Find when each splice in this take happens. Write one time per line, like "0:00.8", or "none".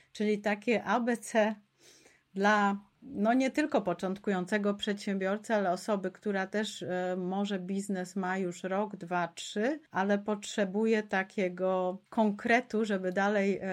0:03.0
0:09.9
0:12.1